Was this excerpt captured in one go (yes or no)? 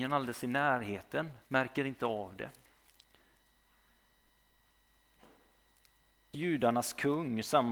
no